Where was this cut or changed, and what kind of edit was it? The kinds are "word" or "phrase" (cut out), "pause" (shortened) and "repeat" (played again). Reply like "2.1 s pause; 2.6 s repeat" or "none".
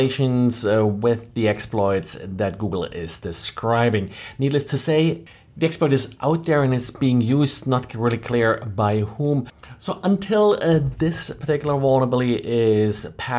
none